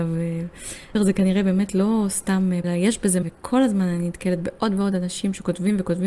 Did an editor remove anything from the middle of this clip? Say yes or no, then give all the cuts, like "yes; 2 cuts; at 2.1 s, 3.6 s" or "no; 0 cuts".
yes; 3 cuts; at 0.9 s, 2.6 s, 3.2 s